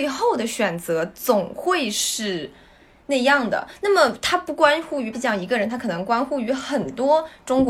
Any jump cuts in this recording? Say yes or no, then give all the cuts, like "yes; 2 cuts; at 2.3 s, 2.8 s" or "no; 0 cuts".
yes; 1 cut; at 5.1 s